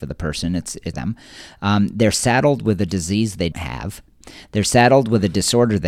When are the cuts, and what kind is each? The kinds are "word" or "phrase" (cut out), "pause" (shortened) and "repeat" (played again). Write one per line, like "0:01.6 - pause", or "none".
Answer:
0:00.9 - phrase
0:03.5 - word